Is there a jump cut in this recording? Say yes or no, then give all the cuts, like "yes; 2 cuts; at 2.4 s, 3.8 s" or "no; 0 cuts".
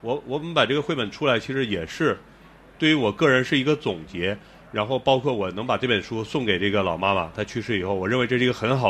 no; 0 cuts